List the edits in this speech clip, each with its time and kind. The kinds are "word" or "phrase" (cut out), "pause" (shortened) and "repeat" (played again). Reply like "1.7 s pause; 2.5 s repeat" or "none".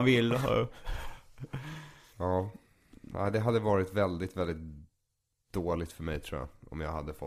none

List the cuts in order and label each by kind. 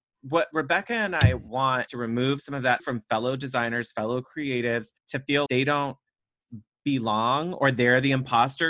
1.9 s word; 2.8 s word; 5.0 s pause; 5.5 s word

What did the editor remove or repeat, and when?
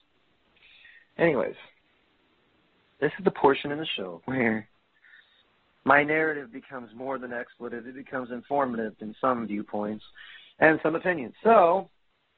4.2 s pause

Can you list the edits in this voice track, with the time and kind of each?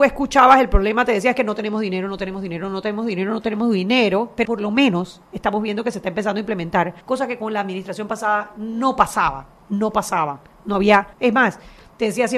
4.4 s word; 7.0 s pause; 11.1 s pause

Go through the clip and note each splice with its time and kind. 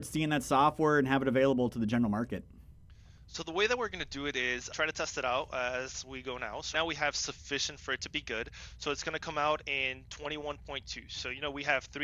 4.7 s word; 6.7 s word

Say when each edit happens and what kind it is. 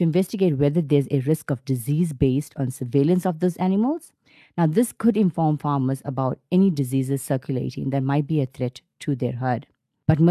none

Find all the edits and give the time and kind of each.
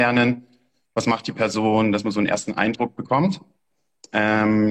none

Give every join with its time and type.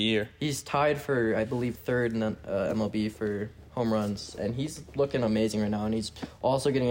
1.7 s word

